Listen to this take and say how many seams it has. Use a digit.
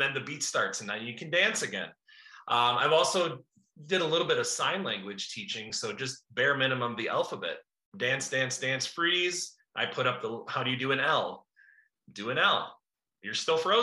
0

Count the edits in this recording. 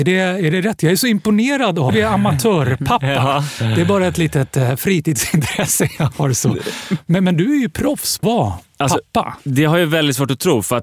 2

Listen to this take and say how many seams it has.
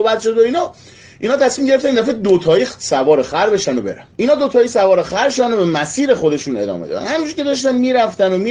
1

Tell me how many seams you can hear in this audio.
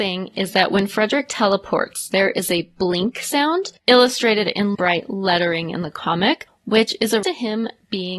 3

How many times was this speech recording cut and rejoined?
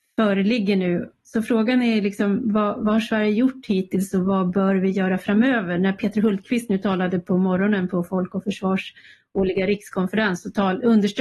0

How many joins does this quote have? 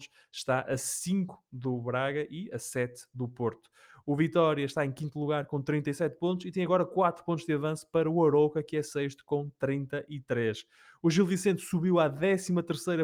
0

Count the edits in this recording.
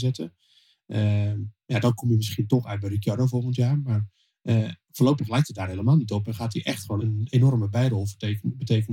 1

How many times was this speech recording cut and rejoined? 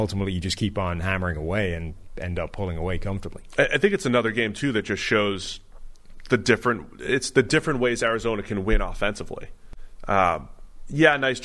0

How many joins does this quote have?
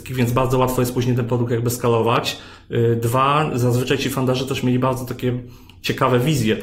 0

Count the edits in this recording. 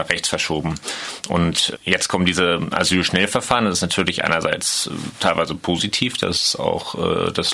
0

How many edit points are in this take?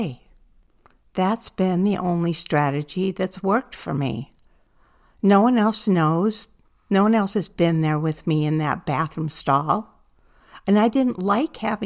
0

